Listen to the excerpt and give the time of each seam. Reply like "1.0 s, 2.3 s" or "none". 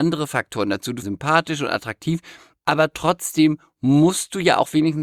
1.0 s